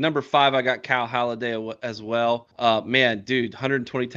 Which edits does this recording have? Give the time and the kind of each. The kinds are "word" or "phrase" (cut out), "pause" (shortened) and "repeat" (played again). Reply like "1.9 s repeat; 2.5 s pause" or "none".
2.5 s pause

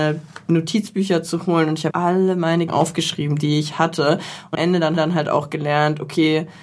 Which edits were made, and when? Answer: 1.9 s word; 2.7 s word; 3.7 s word; 4.5 s word; 5.0 s repeat

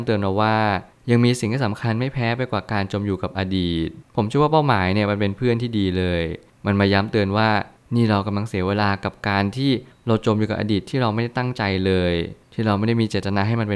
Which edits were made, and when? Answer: none

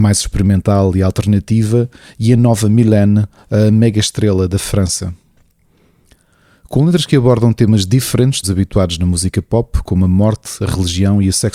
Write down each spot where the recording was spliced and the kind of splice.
8.4 s phrase

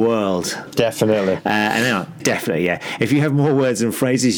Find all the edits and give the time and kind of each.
2.2 s word

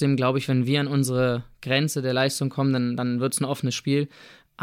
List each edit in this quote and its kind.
none

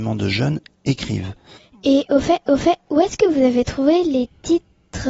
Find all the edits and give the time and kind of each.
2.4 s repeat

